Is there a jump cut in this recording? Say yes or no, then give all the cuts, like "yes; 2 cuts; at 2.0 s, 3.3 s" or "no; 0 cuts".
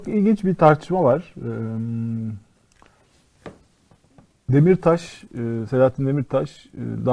no; 0 cuts